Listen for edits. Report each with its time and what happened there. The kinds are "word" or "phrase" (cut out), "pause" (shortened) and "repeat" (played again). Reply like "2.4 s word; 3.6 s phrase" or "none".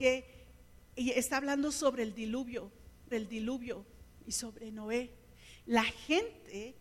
3.1 s repeat